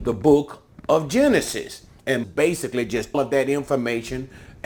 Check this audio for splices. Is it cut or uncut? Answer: cut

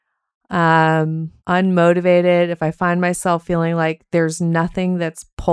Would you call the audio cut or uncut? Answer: cut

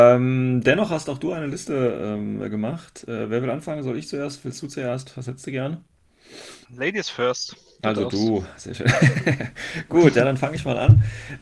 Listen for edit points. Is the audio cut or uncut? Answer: cut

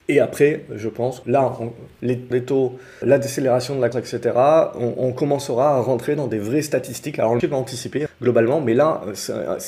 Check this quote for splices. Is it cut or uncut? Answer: cut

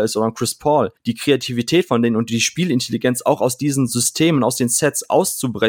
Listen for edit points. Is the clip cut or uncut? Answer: uncut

